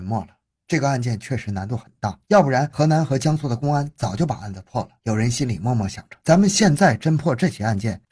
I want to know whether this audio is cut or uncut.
cut